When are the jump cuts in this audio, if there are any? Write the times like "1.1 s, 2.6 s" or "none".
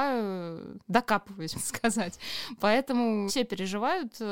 1.5 s, 3.3 s